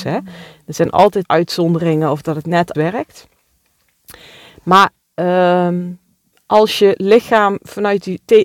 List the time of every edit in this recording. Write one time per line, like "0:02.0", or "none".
0:01.2
0:02.7
0:06.3